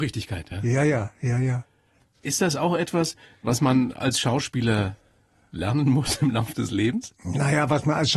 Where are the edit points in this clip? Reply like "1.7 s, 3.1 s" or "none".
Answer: none